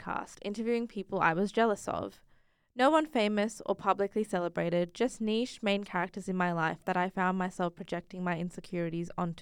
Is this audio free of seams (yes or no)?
yes